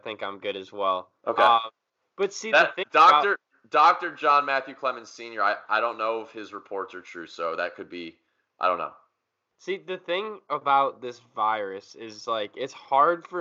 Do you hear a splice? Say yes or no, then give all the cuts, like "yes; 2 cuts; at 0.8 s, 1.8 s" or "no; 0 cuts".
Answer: no; 0 cuts